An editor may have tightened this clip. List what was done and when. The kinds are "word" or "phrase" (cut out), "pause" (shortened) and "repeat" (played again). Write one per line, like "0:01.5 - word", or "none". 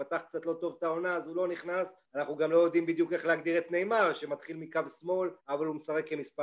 0:02.1 - pause
0:05.4 - pause